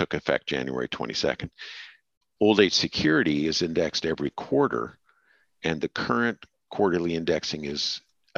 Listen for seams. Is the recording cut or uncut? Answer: uncut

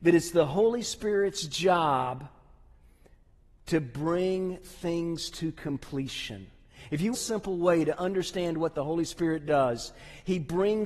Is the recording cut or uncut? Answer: cut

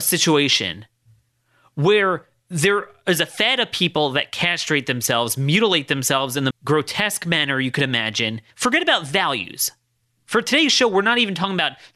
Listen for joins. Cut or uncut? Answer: cut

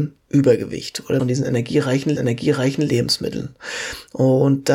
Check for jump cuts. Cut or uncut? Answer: cut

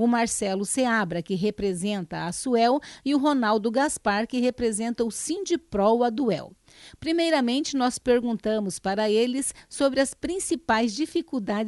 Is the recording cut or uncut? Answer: uncut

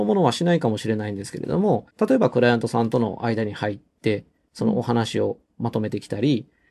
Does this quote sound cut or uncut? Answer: cut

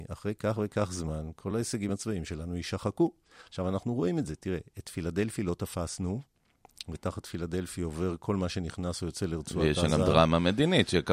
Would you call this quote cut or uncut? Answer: uncut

